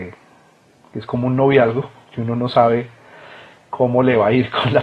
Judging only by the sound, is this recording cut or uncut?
uncut